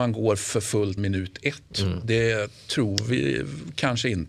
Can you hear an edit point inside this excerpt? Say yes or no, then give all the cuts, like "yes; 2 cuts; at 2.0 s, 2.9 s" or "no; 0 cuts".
yes; 1 cut; at 1.0 s